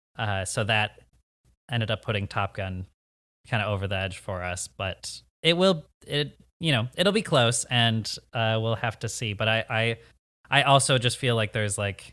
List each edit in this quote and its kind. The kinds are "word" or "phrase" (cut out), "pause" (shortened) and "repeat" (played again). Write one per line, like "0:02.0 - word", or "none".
none